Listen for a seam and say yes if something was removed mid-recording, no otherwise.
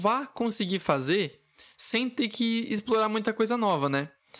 yes